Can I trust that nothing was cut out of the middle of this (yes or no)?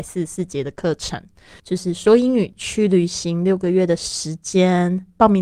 no